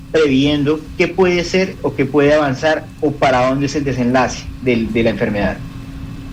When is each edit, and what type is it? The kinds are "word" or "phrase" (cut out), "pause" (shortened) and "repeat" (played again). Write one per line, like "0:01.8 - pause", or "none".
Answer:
0:04.6 - word